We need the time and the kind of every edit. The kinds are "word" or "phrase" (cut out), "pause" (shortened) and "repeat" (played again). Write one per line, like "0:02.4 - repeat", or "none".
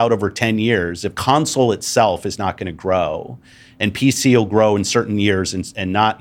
none